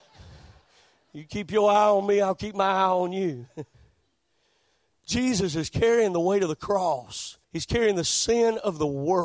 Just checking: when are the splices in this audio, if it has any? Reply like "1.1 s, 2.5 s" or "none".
3.7 s, 7.4 s

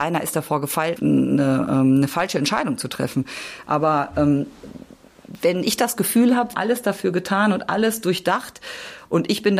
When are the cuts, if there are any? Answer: 1.0 s, 6.5 s

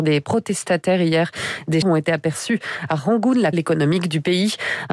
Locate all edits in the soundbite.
1.8 s, 3.5 s

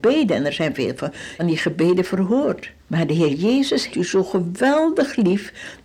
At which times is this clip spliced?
1.4 s, 2.8 s, 3.9 s

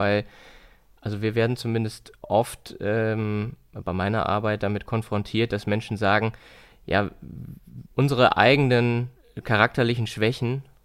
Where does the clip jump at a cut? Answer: 7.9 s, 9.2 s

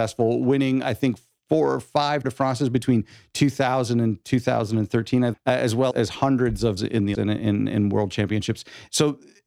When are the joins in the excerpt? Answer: 2.2 s, 5.3 s, 5.9 s, 6.8 s, 7.1 s

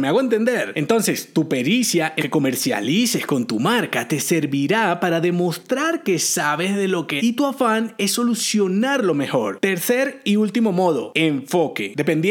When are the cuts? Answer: 2.2 s, 7.2 s

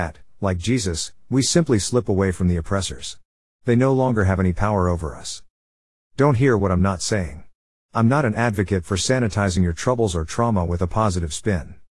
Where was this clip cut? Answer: none

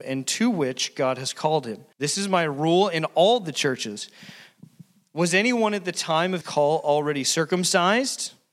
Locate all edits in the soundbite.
1.9 s, 6.4 s

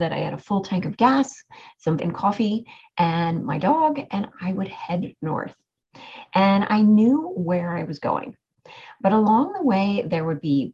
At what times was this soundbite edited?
2.0 s

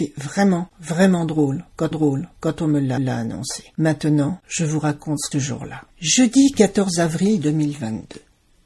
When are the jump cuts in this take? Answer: 1.9 s, 3.0 s, 5.3 s, 5.9 s

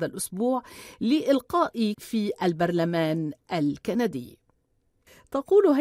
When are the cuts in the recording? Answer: 1.9 s

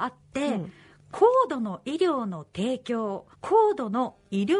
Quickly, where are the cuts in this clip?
3.3 s

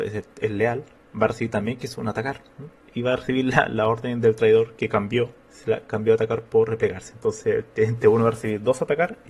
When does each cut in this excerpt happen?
1.0 s, 2.8 s, 5.4 s

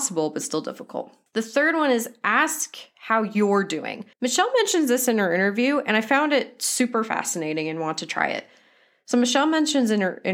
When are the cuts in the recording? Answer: 1.3 s, 4.1 s

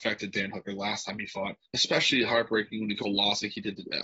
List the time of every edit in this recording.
1.6 s, 3.0 s

